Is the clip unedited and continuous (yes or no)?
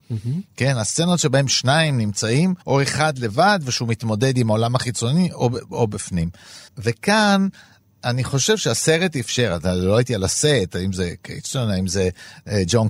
no